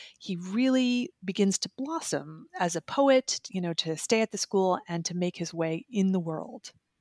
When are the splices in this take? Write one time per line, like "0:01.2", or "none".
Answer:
none